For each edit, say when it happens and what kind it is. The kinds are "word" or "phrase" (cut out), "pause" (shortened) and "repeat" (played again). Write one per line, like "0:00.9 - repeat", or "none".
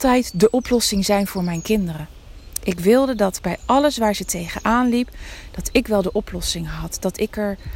none